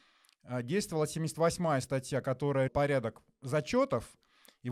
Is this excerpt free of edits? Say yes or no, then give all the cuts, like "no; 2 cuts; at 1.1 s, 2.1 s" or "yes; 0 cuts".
no; 1 cut; at 2.7 s